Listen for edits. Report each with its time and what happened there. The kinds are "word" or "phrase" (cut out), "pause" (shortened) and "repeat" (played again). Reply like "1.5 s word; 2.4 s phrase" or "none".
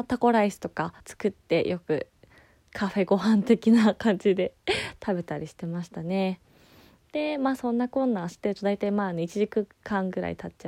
1.0 s pause